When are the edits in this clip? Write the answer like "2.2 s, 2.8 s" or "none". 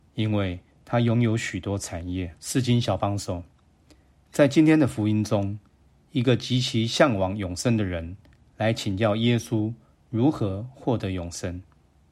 2.4 s